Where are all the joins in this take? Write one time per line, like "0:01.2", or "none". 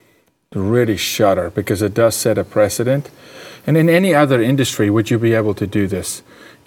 none